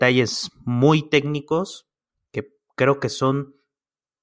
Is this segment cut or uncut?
uncut